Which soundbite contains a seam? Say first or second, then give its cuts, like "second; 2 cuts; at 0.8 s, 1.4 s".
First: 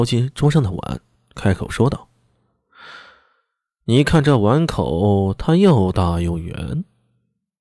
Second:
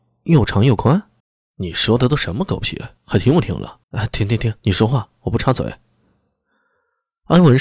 second; 4 cuts; at 1.2 s, 3.0 s, 3.8 s, 4.6 s